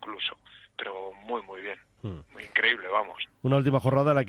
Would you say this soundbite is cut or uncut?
cut